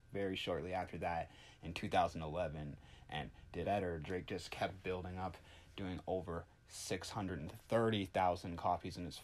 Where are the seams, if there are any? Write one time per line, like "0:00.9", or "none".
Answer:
0:03.6